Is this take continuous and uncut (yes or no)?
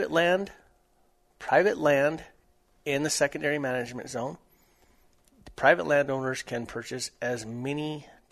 yes